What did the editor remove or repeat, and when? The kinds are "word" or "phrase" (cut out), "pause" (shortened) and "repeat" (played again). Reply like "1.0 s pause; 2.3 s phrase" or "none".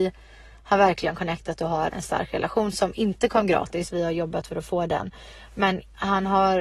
1.9 s word